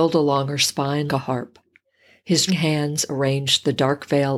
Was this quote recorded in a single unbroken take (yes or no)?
no